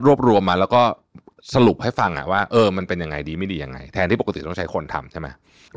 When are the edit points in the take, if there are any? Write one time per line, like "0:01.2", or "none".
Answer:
none